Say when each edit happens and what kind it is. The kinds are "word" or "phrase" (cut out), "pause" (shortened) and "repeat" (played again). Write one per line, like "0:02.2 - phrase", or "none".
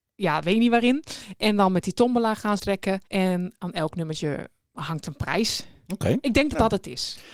0:02.6 - phrase
0:03.1 - pause